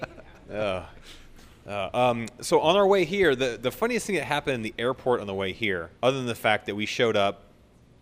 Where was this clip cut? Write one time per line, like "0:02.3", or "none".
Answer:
0:06.0